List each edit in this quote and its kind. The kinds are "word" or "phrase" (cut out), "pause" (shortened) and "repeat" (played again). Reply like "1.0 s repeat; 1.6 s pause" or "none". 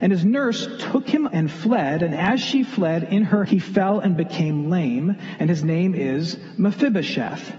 1.3 s word; 3.5 s word